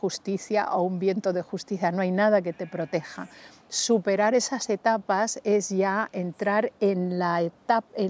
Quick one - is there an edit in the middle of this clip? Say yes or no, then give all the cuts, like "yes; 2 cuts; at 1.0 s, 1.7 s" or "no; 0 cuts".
no; 0 cuts